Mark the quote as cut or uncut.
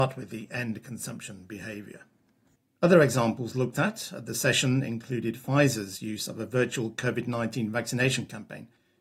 cut